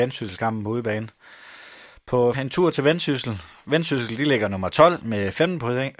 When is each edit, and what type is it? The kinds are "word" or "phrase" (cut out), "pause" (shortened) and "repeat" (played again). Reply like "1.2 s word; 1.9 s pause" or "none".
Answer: 2.3 s word